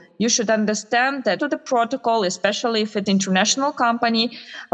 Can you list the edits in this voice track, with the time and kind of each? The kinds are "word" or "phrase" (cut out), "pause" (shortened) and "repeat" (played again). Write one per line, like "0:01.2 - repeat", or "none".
0:01.4 - word
0:03.1 - word